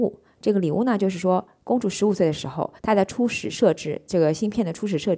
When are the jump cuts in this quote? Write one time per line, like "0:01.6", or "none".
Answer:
0:02.8